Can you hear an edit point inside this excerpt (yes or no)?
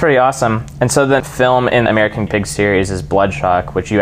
yes